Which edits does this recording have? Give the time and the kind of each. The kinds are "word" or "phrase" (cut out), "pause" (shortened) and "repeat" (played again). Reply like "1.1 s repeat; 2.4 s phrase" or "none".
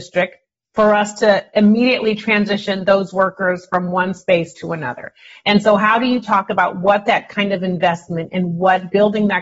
none